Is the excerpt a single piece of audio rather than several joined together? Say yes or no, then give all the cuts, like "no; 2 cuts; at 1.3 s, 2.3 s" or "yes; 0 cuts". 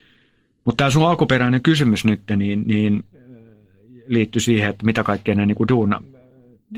yes; 0 cuts